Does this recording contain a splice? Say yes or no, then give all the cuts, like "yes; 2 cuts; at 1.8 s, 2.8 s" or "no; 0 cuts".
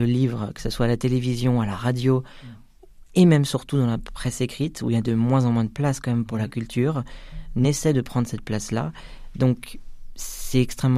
yes; 1 cut; at 7.6 s